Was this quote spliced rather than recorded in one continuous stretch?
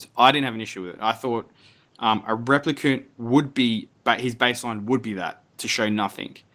no; 0 cuts

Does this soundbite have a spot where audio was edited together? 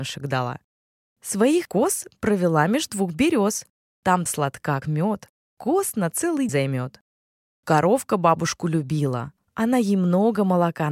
yes; 4 cuts; at 1.6 s, 4.3 s, 4.8 s, 6.5 s

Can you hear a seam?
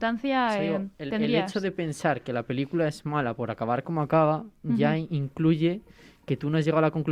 no; 0 cuts

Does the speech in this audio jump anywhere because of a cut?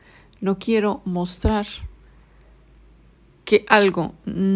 no; 0 cuts

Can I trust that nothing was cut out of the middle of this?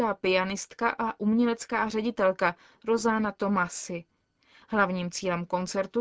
yes; 0 cuts

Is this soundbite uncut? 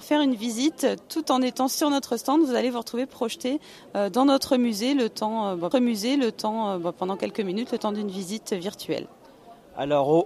no; 1 cut; at 5.7 s

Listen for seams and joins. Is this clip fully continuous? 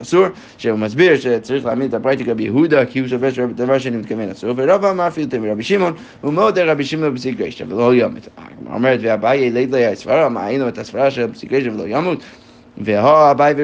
yes; 0 cuts

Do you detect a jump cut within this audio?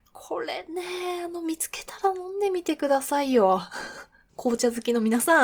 no; 0 cuts

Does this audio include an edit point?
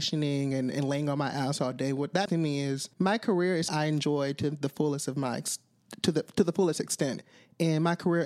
yes; 3 cuts; at 2.3 s, 2.9 s, 3.7 s

